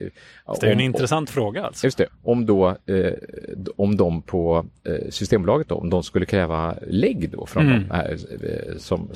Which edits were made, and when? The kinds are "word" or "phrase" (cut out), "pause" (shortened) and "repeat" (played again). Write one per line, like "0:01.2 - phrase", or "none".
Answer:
0:02.1 - word